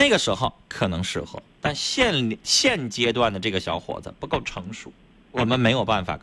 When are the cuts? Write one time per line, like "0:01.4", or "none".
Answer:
0:01.5
0:05.0